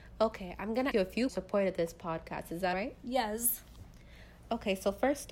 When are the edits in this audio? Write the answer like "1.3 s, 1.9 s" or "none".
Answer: 0.9 s, 1.3 s, 2.7 s